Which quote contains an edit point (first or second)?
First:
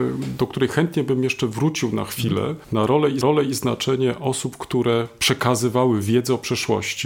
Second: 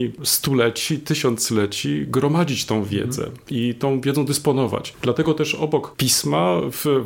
first